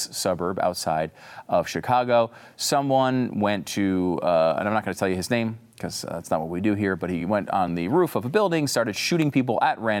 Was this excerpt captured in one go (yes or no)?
yes